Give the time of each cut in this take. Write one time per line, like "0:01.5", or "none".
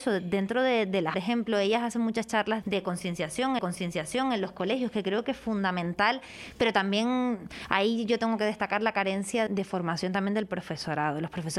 0:01.1
0:02.6
0:03.6
0:09.5

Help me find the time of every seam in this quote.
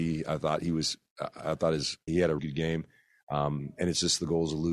0:02.1
0:02.4

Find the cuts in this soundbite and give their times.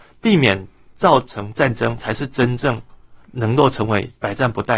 0:03.2

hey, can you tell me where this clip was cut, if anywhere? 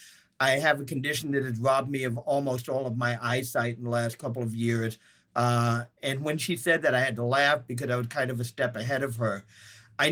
none

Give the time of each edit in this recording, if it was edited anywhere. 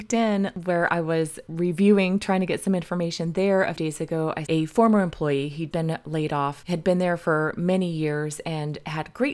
0:03.8
0:04.5
0:05.7

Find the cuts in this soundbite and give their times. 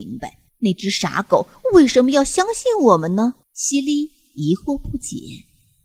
0:03.4

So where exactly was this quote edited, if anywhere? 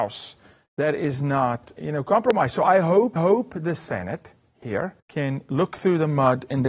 0:01.8
0:03.2
0:05.0

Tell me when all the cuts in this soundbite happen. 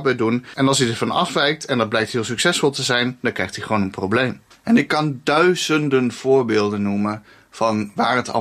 0:04.5

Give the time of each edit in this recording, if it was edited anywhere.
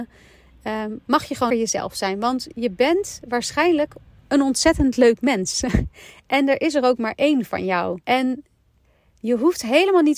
0:01.5
0:08.0

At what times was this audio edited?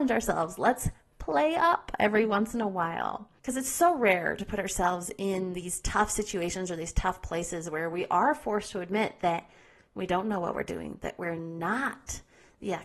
0:03.4

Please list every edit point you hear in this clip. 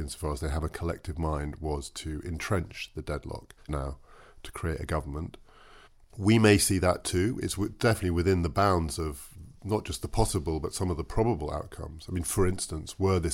0:03.7
0:05.9

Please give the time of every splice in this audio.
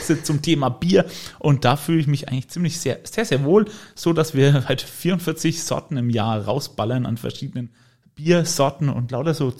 none

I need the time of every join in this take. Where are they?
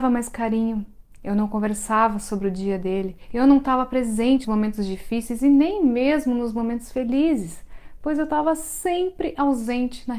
0:04.4

